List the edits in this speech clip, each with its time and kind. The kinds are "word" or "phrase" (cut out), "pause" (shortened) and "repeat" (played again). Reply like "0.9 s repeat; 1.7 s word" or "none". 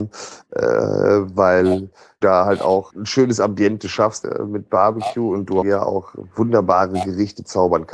2.2 s word; 2.9 s word; 4.2 s word; 5.6 s word